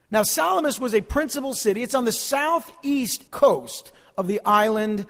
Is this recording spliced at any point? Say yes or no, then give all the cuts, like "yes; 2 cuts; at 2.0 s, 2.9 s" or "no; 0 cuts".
yes; 1 cut; at 3.3 s